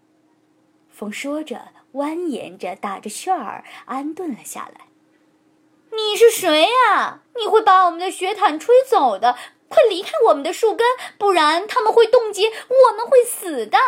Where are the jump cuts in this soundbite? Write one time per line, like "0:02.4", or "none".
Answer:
0:07.3